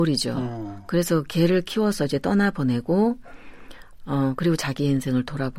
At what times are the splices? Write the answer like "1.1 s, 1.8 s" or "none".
none